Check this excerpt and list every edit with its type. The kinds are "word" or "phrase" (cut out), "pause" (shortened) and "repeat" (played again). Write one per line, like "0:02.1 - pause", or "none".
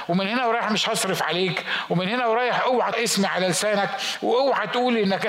0:02.9 - word